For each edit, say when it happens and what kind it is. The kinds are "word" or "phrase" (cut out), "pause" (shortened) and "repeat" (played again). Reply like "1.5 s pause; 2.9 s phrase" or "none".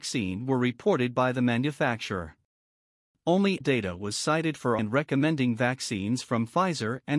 3.6 s word; 4.8 s word